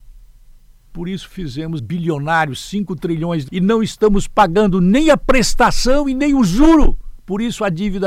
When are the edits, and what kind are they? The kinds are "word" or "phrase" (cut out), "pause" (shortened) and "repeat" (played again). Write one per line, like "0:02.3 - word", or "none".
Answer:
0:01.8 - word
0:03.5 - word

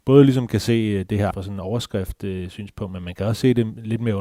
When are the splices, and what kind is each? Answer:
0:01.3 - word

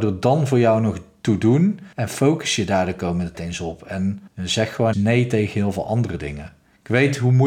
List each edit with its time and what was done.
0:01.9 - pause
0:03.3 - word
0:04.3 - pause
0:04.9 - word

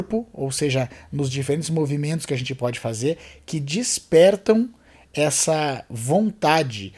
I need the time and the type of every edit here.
none

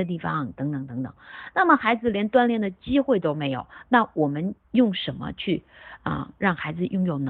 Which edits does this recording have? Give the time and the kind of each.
0:04.6 - pause

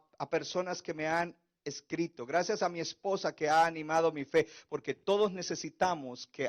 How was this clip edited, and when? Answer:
none

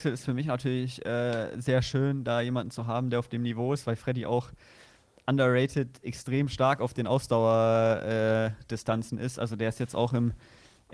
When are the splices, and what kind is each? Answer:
none

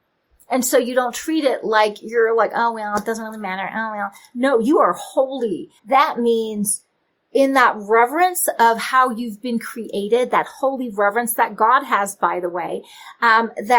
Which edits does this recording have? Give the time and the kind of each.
0:05.8 - pause

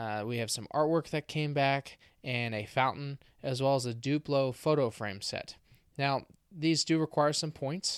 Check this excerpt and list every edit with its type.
none

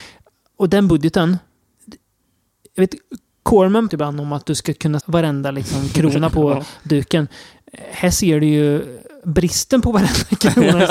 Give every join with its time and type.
0:03.9 - word
0:05.0 - word
0:06.3 - word

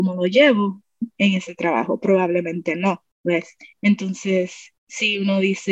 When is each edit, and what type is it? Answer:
0:03.1 - pause
0:04.8 - pause

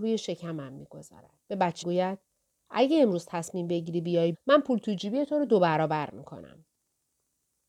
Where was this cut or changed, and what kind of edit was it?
0:01.4 - pause
0:01.8 - word
0:04.3 - word

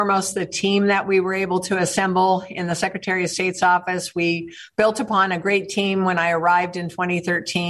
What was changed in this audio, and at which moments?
none

